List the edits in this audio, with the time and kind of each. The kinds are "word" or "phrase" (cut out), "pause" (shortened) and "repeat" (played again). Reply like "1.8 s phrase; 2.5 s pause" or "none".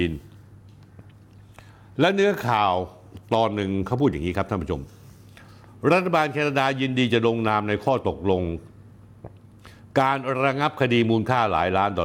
none